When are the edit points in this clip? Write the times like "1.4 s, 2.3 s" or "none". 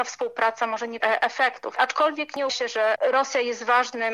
1.0 s, 2.5 s